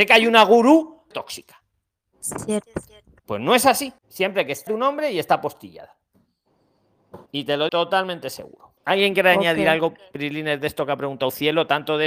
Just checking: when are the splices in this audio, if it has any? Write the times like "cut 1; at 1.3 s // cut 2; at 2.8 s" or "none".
cut 1; at 1.1 s // cut 2; at 2.4 s // cut 3; at 3.2 s // cut 4; at 4.0 s // cut 5; at 4.7 s // cut 6; at 7.3 s // cut 7; at 7.7 s // cut 8; at 8.8 s